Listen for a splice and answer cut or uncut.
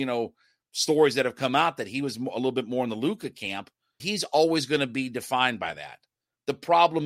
cut